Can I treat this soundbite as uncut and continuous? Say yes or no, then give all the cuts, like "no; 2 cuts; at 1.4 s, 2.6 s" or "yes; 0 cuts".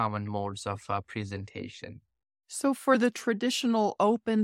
no; 1 cut; at 2.3 s